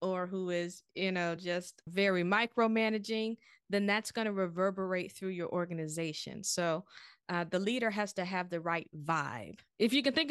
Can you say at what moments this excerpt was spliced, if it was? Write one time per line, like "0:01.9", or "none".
none